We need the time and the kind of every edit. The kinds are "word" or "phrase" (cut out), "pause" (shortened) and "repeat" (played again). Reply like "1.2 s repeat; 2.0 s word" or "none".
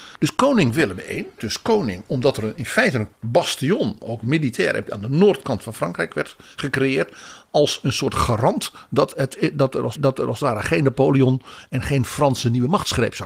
1.4 s word; 3.1 s word; 4.9 s word; 10.0 s repeat